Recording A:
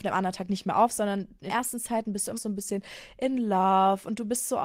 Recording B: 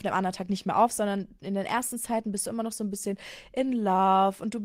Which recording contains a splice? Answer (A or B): A